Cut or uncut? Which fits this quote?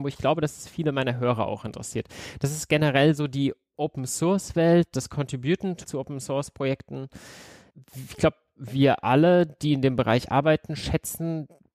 uncut